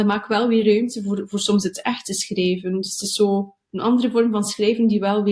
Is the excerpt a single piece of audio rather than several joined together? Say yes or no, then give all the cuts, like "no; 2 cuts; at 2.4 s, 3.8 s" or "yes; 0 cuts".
yes; 0 cuts